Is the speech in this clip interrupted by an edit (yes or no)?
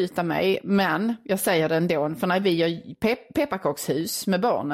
no